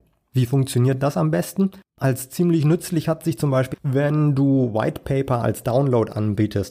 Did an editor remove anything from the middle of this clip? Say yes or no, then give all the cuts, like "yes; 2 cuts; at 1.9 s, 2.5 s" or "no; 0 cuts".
yes; 1 cut; at 3.7 s